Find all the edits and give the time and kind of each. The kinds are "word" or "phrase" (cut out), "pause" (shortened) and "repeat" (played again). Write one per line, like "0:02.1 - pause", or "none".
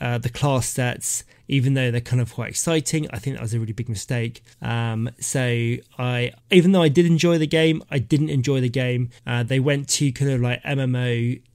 0:04.5 - pause
0:06.4 - pause
0:09.2 - pause

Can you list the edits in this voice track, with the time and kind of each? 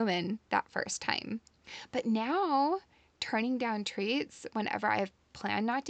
none

